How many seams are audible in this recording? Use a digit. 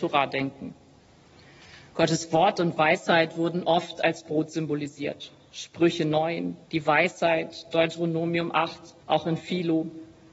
2